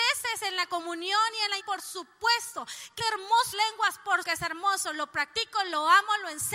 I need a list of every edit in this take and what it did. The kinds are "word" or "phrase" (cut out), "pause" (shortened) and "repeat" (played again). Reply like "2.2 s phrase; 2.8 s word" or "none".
1.6 s word; 3.0 s word; 3.5 s word; 4.2 s word